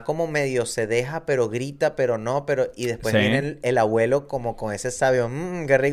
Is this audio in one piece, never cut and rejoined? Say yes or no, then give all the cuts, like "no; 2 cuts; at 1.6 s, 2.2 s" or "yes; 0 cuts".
yes; 0 cuts